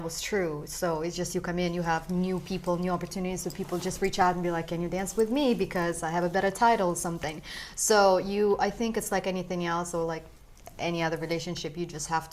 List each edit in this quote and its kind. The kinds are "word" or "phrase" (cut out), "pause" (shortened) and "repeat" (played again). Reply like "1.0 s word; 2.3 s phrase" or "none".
none

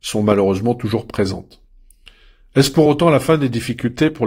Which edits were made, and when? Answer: none

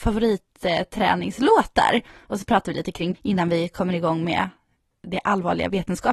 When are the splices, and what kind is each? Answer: 3.1 s word

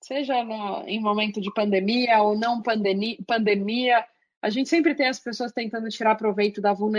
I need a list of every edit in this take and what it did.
none

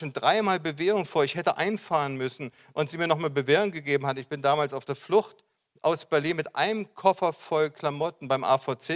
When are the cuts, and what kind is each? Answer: none

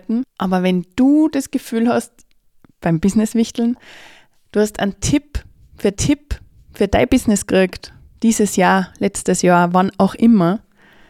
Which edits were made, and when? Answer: 5.9 s repeat

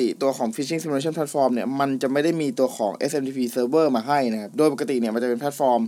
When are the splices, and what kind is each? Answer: none

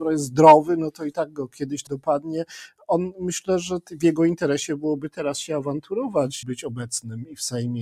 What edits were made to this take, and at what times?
1.9 s word; 6.4 s word

